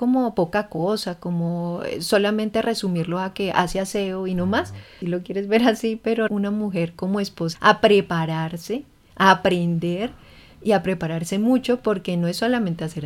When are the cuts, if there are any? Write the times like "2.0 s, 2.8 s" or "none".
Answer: 5.0 s, 6.3 s, 7.5 s